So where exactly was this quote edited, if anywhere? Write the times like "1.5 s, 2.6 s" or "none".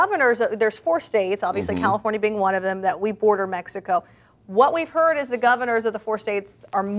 none